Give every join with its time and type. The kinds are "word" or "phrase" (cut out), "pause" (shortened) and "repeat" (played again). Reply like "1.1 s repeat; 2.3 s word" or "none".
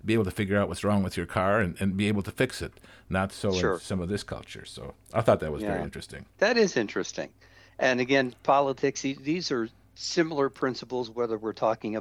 6.3 s pause